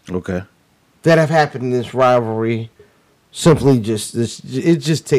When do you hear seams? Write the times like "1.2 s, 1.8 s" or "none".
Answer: none